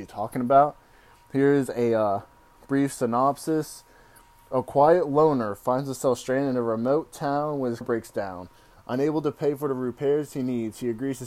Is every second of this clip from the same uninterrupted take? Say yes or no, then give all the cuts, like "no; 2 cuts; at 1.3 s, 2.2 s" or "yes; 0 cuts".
no; 1 cut; at 7.8 s